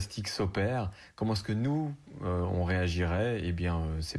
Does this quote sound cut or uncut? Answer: uncut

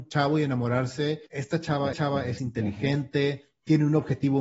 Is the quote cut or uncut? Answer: cut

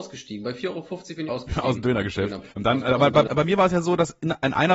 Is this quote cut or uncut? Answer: cut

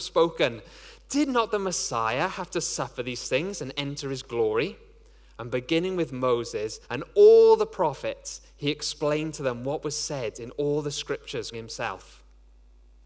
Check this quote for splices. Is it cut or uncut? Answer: cut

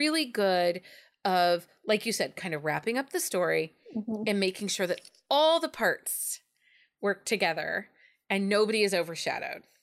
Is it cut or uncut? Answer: uncut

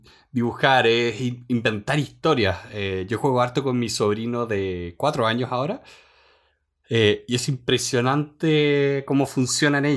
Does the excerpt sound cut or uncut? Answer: uncut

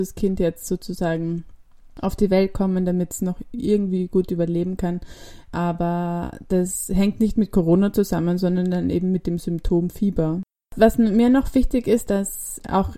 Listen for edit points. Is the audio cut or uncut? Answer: uncut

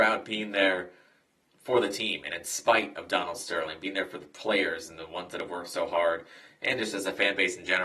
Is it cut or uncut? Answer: uncut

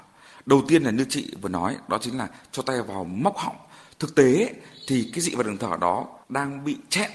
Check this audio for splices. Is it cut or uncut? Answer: cut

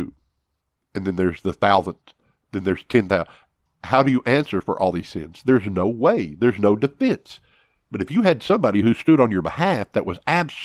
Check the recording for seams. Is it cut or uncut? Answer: uncut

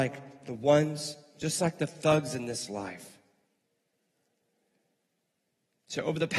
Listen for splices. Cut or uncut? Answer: uncut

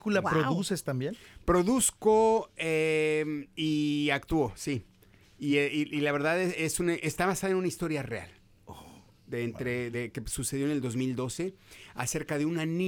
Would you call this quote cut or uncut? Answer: uncut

